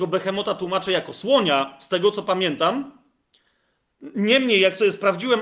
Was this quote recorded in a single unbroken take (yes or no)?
yes